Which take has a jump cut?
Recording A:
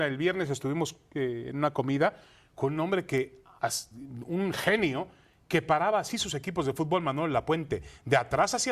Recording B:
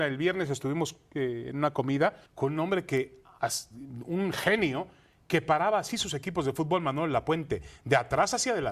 B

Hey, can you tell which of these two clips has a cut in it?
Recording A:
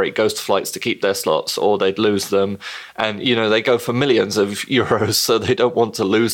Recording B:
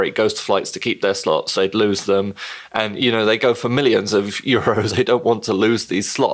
B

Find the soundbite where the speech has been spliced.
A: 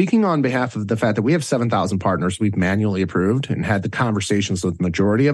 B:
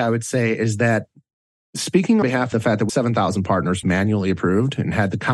B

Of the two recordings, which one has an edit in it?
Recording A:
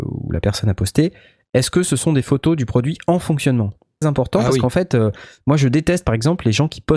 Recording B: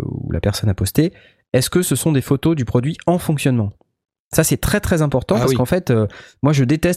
A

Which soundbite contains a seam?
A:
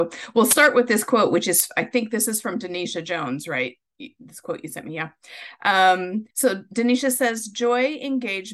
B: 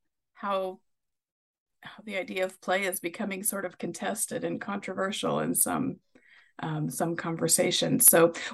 A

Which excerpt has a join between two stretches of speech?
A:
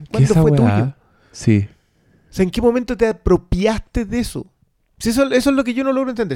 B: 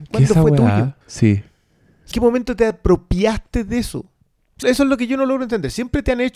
B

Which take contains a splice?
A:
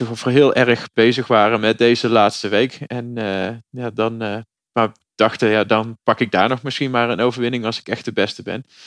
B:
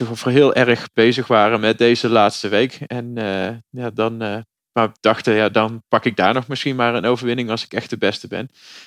B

